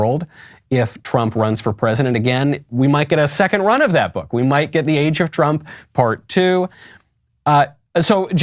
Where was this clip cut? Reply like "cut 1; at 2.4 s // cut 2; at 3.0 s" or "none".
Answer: none